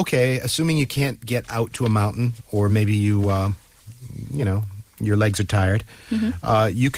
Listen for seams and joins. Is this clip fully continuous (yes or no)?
yes